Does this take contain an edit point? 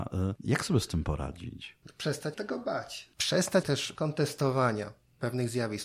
yes; 3 cuts; at 2.3 s, 3.6 s, 3.9 s

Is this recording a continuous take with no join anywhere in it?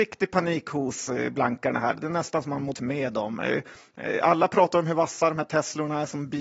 no; 1 cut; at 2.7 s

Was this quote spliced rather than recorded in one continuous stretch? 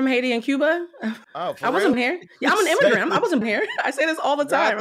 yes; 3 cuts; at 1.2 s, 1.9 s, 3.4 s

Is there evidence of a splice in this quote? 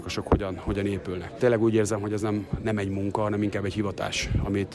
no; 0 cuts

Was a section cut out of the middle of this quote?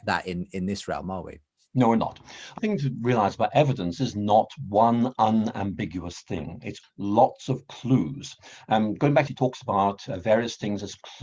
yes; 4 cuts; at 2.6 s, 4.0 s, 6.8 s, 9.3 s

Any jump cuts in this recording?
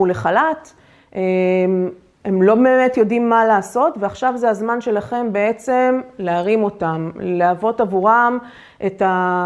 no; 0 cuts

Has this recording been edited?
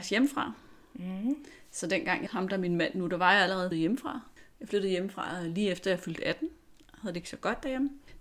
yes; 2 cuts; at 2.3 s, 3.7 s

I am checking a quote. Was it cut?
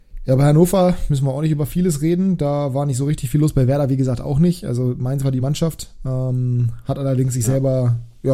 yes; 1 cut; at 5.4 s

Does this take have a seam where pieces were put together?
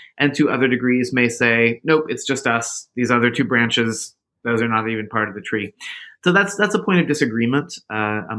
no; 0 cuts

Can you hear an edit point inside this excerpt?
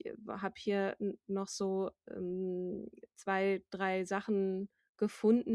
no; 0 cuts

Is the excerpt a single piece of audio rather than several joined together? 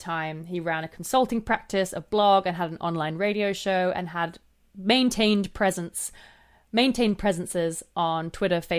yes; 0 cuts

